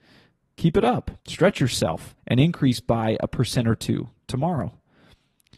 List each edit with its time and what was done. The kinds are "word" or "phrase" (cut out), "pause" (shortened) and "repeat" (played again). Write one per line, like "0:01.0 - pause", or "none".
0:01.2 - pause
0:02.2 - pause